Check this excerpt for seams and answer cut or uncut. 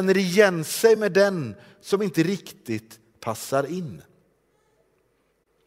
uncut